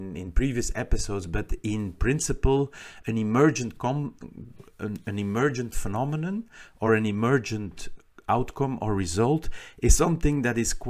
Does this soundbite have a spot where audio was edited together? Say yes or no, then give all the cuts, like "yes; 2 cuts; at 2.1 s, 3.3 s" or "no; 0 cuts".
no; 0 cuts